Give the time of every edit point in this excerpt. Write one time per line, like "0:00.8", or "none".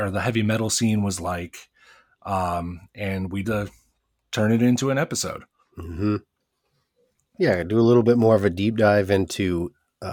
0:03.4